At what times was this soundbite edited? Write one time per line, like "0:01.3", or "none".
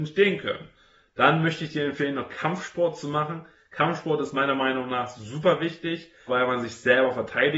0:06.3